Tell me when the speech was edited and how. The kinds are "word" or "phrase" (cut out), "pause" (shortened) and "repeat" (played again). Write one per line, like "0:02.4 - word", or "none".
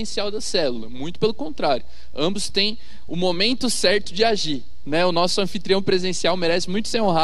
none